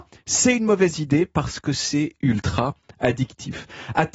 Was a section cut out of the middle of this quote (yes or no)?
no